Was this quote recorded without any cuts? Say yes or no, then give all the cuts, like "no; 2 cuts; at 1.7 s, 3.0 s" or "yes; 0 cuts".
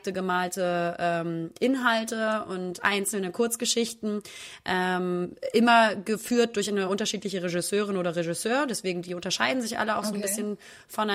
yes; 0 cuts